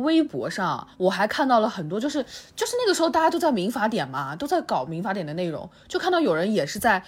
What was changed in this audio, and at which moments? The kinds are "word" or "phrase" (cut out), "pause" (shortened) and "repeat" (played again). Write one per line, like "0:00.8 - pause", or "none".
0:00.9 - pause

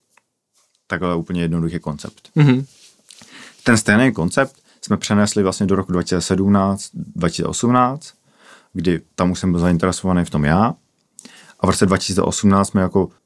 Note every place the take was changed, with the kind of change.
none

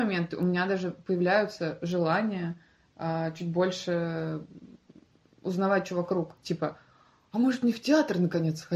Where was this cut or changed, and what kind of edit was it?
none

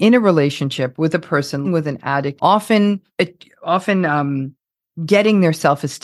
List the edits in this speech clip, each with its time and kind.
0:01.6 - word
0:02.4 - phrase
0:03.1 - pause

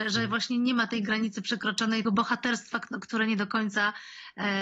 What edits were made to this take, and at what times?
0:02.0 - word

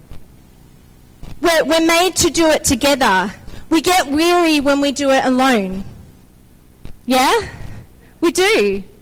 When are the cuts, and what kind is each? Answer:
0:07.0 - pause

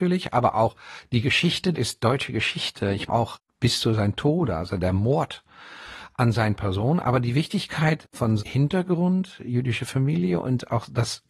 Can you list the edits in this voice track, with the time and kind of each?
0:01.7 - word
0:03.1 - word
0:08.4 - phrase

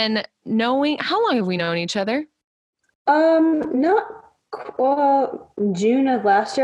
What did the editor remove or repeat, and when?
none

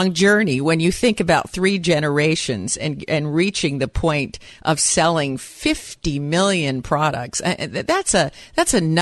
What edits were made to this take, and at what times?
none

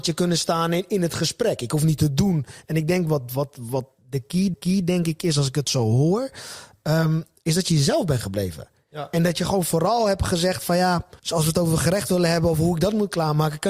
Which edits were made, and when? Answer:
0:04.5 - repeat
0:11.2 - pause

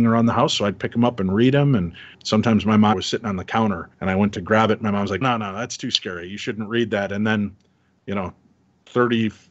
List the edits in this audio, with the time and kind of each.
0:02.1 - pause
0:02.9 - phrase
0:03.9 - pause
0:05.2 - word

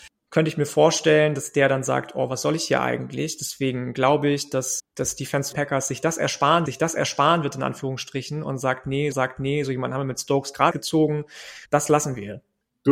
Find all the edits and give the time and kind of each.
0:04.8 - word
0:05.5 - phrase
0:06.7 - repeat
0:09.1 - repeat
0:10.7 - word
0:11.7 - pause

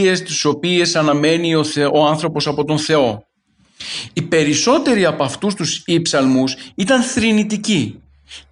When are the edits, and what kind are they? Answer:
none

